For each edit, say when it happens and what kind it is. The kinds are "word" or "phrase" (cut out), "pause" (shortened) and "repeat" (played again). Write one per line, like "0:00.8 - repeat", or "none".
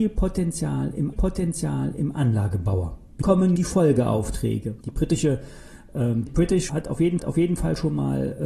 0:01.1 - repeat
0:03.2 - word
0:03.6 - word
0:04.8 - pause
0:06.3 - word
0:06.7 - word
0:07.2 - repeat